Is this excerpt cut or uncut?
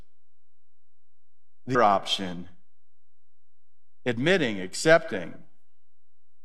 cut